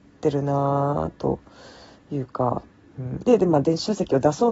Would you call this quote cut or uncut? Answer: uncut